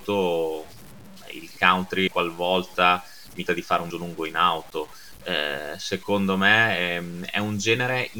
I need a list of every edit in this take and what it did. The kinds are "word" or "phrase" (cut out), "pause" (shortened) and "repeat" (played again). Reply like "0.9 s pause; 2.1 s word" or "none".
2.1 s word; 3.5 s word; 3.9 s word